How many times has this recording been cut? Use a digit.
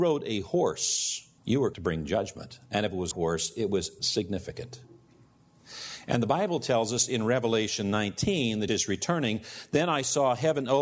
5